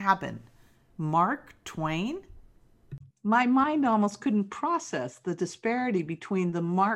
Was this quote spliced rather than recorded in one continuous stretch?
yes; 1 cut; at 3.1 s

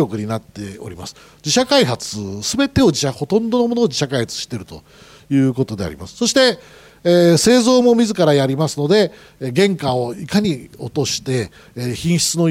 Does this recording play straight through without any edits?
yes; 0 cuts

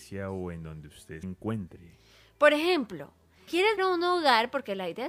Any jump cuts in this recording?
yes; 3 cuts; at 1.2 s, 3.5 s, 3.8 s

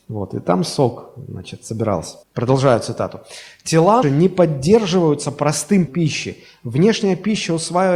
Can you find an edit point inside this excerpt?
yes; 3 cuts; at 2.2 s, 4.0 s, 5.9 s

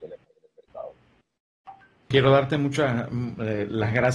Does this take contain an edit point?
yes; 1 cut; at 2.1 s

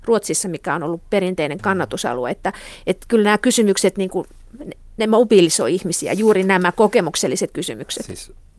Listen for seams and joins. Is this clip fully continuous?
yes; 0 cuts

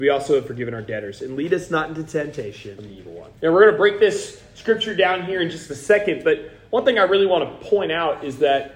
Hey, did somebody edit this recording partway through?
yes; 2 cuts; at 2.8 s, 3.4 s

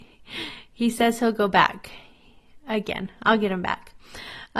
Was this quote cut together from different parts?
no; 0 cuts

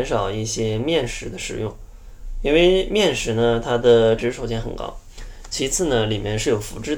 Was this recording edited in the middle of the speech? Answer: yes; 1 cut; at 4.2 s

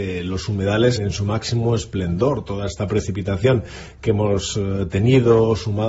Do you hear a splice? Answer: yes; 1 cut; at 1.0 s

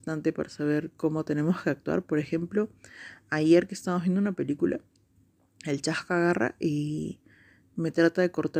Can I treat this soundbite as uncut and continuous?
yes; 0 cuts

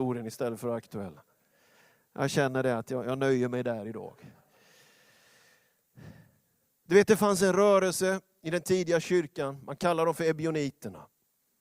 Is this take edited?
no; 0 cuts

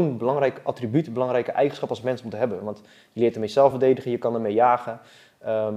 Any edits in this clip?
no; 0 cuts

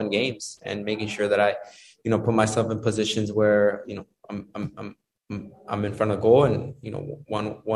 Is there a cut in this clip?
no; 0 cuts

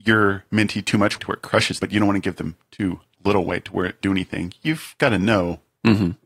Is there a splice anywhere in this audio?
yes; 3 cuts; at 1.2 s, 1.8 s, 4.0 s

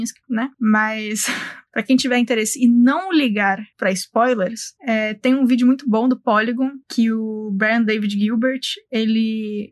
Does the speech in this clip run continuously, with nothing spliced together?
yes; 0 cuts

